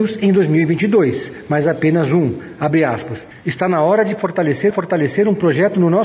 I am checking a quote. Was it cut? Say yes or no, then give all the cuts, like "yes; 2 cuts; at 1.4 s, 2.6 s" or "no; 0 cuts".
yes; 1 cut; at 4.7 s